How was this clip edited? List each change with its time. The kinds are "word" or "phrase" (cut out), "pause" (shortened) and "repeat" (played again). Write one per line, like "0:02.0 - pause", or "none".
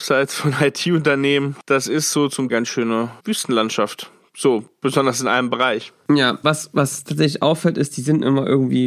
0:02.5 - phrase
0:03.2 - pause
0:06.4 - word